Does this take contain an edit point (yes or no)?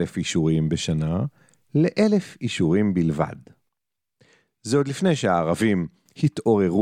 no